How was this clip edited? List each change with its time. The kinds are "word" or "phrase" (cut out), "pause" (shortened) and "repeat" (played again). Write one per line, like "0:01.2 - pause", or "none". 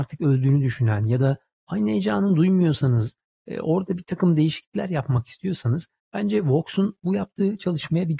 none